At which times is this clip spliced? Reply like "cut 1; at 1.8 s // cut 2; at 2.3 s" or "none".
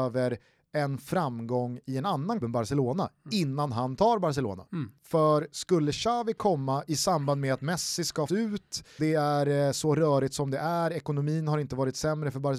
cut 1; at 2.4 s // cut 2; at 5.0 s // cut 3; at 8.3 s // cut 4; at 9.0 s